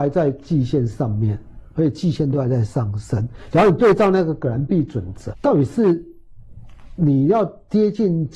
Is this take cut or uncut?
cut